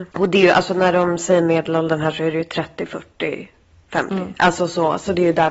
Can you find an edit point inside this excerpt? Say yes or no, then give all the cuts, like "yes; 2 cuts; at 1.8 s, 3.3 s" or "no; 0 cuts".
no; 0 cuts